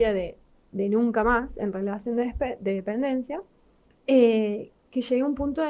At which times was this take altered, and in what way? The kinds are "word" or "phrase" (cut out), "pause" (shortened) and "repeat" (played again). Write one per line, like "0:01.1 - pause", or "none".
0:03.9 - pause